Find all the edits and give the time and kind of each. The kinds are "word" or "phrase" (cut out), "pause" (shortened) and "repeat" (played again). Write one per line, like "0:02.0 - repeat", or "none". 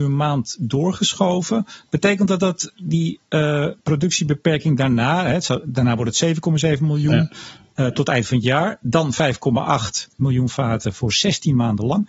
0:03.8 - pause